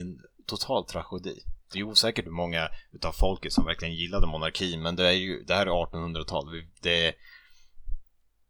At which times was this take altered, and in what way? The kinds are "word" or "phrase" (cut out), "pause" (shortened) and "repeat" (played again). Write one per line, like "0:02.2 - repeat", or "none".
0:01.6 - pause